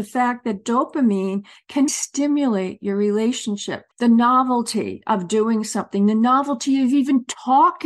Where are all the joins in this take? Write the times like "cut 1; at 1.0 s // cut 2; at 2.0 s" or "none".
cut 1; at 1.9 s // cut 2; at 3.9 s